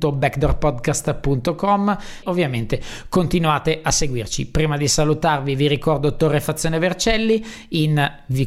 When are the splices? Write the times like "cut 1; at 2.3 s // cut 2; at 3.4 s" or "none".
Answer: cut 1; at 2.2 s